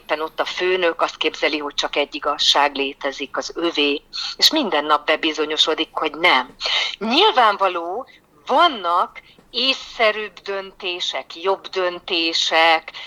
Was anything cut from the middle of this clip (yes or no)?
no